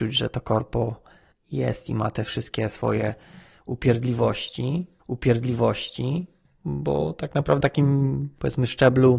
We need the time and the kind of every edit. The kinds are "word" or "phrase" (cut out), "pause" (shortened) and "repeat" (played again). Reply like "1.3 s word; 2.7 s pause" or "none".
5.0 s repeat; 7.6 s word